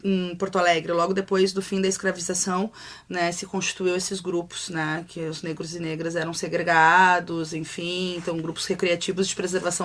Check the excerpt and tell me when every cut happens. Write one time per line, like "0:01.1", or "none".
none